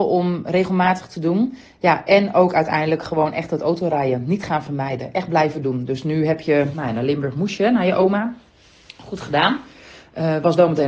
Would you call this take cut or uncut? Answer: uncut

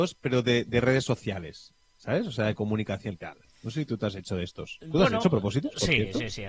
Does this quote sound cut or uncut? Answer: cut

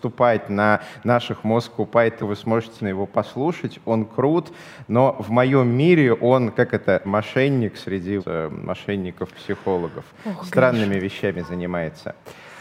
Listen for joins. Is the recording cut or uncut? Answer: cut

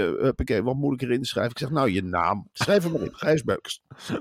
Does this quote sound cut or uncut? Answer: cut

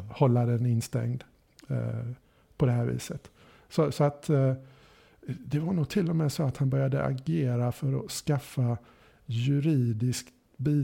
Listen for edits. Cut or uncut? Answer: uncut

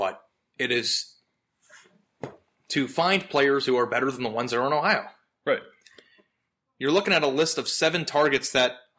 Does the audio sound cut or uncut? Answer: uncut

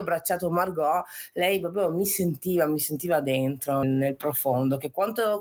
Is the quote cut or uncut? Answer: cut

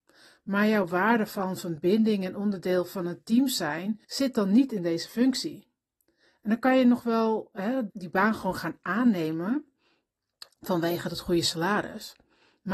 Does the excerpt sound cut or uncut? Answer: cut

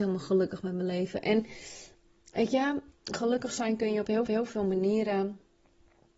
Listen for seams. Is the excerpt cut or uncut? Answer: cut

